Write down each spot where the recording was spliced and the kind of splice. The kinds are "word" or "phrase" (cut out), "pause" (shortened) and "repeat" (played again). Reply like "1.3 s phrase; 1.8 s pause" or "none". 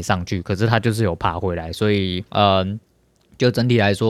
2.3 s pause